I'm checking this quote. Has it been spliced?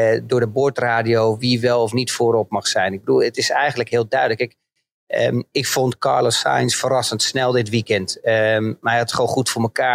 no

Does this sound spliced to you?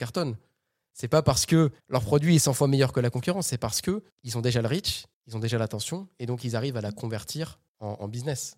yes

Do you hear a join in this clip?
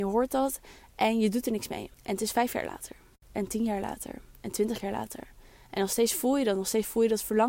yes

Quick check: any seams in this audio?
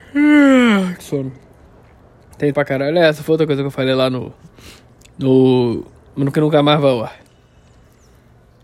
yes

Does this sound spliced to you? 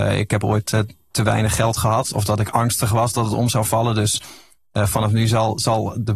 no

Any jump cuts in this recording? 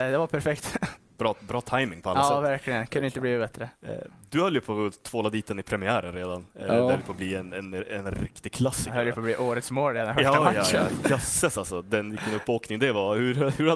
no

